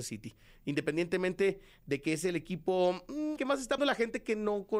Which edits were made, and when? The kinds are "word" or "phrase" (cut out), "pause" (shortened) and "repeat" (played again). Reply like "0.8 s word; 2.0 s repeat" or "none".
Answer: 3.4 s word; 3.8 s word